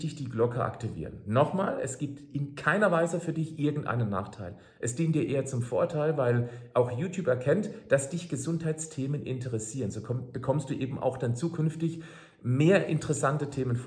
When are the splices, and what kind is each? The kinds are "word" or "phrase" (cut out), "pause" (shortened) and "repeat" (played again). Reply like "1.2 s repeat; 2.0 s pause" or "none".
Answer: none